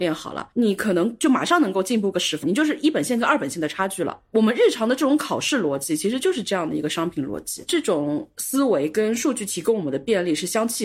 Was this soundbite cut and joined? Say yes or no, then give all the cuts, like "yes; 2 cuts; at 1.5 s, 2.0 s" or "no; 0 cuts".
yes; 1 cut; at 2.4 s